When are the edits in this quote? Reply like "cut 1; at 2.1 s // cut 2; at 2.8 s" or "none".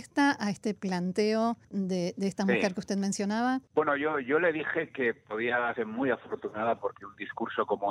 cut 1; at 1.6 s // cut 2; at 3.7 s // cut 3; at 5.8 s

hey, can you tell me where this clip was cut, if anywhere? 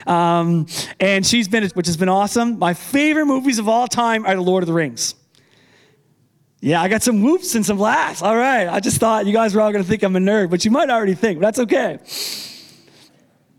cut 1; at 1.7 s

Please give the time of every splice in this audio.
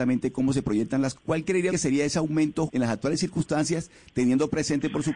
cut 1; at 1.1 s // cut 2; at 1.7 s // cut 3; at 2.7 s

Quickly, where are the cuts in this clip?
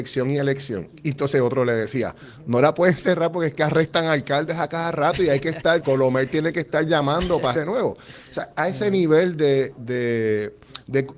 cut 1; at 5.8 s // cut 2; at 7.5 s

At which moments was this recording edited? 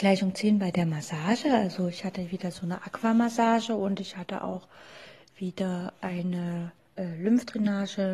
cut 1; at 6.8 s

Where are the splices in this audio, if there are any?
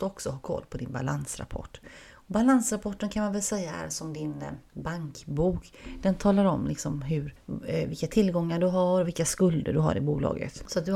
none

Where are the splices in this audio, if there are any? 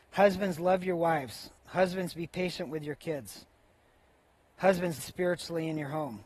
cut 1; at 1.6 s // cut 2; at 5.0 s

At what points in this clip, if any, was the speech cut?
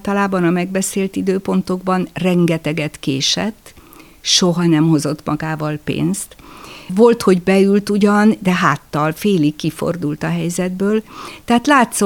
none

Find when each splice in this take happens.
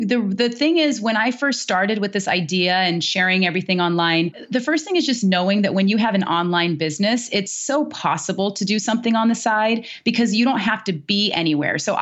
none

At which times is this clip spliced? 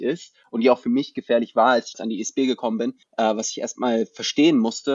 cut 1; at 1.9 s // cut 2; at 3.0 s

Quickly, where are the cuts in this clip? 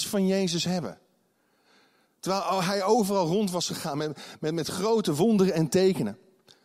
none

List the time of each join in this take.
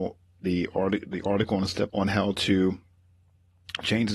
cut 1; at 1.9 s

